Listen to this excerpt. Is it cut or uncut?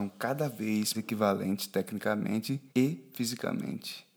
cut